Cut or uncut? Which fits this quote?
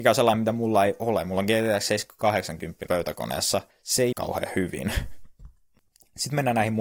cut